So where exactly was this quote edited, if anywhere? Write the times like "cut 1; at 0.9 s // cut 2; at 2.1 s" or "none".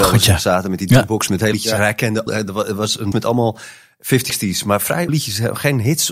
cut 1; at 1.5 s // cut 2; at 2.3 s // cut 3; at 3.1 s // cut 4; at 4.3 s // cut 5; at 5.1 s